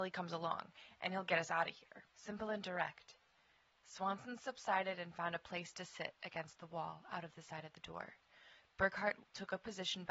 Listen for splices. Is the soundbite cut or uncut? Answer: uncut